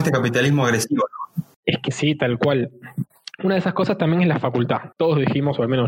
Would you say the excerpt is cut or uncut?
cut